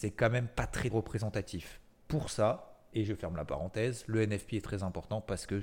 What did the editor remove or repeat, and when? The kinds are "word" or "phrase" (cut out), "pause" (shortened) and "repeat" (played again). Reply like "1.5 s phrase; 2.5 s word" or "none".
0.9 s word